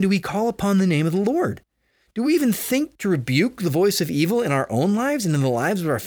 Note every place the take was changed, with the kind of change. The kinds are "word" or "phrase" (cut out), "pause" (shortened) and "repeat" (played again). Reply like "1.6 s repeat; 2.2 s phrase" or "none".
none